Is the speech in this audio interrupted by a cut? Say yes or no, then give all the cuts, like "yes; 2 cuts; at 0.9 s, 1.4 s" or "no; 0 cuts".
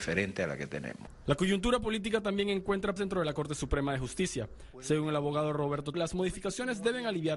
yes; 2 cuts; at 3.0 s, 5.9 s